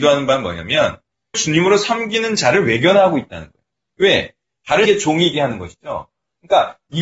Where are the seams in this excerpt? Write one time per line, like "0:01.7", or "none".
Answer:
0:01.3
0:04.9
0:05.3